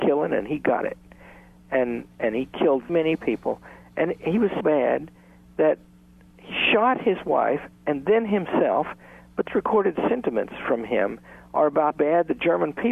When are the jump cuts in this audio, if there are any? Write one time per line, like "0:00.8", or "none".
0:02.9
0:04.6
0:09.5
0:11.9